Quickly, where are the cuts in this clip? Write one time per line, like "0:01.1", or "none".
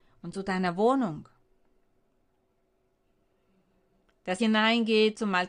0:04.4